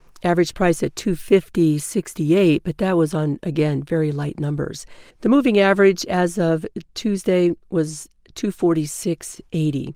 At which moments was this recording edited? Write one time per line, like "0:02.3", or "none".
0:05.1